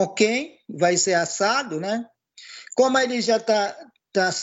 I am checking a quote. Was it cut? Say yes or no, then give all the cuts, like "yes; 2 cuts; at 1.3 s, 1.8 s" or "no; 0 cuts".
no; 0 cuts